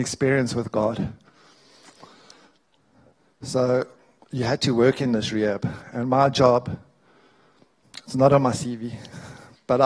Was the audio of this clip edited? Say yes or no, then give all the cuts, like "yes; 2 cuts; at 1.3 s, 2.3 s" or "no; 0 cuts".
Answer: no; 0 cuts